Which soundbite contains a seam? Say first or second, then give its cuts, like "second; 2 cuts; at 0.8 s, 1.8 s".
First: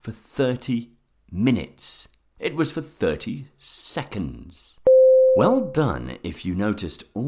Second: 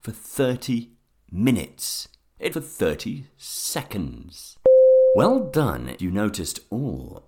second; 2 cuts; at 2.5 s, 6.0 s